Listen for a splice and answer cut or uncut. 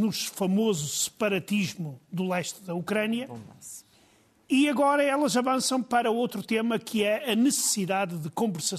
uncut